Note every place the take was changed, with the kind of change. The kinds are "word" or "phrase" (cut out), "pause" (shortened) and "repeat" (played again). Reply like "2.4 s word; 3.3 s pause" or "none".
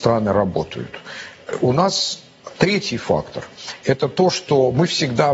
2.6 s pause